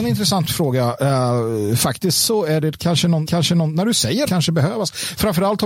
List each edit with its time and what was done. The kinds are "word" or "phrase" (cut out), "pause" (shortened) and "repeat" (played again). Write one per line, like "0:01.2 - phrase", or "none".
0:03.2 - repeat
0:04.3 - phrase